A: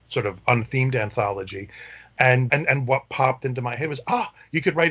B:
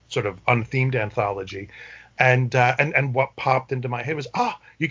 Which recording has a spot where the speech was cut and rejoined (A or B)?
A